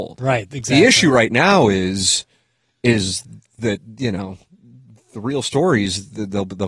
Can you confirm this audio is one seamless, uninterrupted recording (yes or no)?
yes